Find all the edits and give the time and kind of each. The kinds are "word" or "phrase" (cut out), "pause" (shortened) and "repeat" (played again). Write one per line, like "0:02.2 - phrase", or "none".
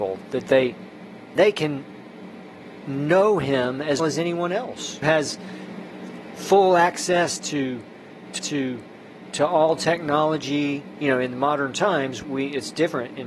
0:01.4 - word
0:04.0 - word
0:05.0 - word
0:08.4 - repeat
0:12.2 - word